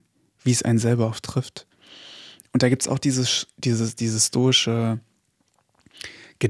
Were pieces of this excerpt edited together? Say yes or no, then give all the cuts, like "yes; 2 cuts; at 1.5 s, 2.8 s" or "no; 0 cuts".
no; 0 cuts